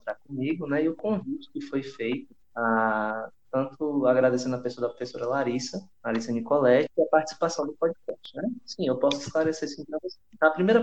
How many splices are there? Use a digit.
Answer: 2